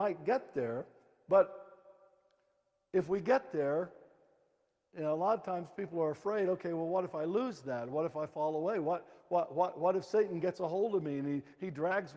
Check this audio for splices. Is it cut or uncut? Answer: uncut